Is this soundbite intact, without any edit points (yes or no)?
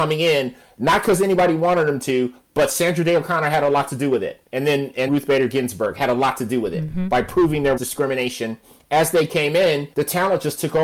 no